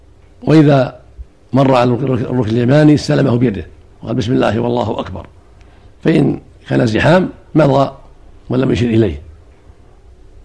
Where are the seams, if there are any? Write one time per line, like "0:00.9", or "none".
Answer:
none